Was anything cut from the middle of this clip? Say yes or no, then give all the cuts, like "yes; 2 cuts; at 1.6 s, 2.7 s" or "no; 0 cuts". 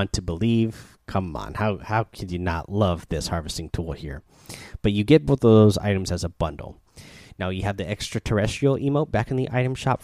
no; 0 cuts